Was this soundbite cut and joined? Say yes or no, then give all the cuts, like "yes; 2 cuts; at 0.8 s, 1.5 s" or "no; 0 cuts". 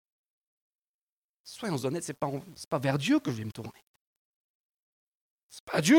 no; 0 cuts